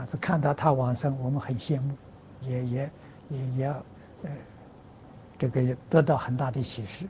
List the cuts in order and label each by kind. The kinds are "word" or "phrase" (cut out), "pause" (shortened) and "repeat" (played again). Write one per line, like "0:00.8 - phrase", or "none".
0:02.4 - word